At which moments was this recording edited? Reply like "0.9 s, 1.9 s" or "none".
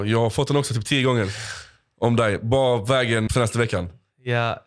3.3 s